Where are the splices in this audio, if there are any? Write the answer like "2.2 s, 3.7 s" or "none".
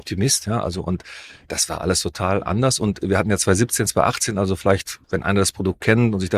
5.0 s